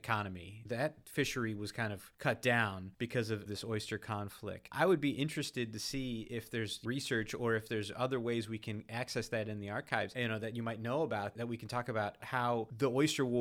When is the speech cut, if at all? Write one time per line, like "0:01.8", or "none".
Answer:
none